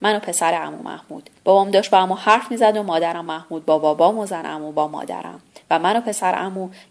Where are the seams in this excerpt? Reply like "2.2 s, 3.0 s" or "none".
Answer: 1.4 s, 3.3 s